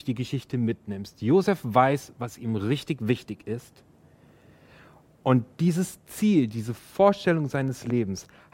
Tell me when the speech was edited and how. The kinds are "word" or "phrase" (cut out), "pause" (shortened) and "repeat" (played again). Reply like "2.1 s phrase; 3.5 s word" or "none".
none